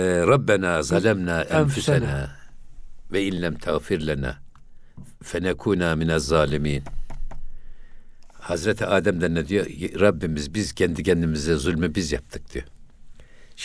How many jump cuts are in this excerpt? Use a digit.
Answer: 0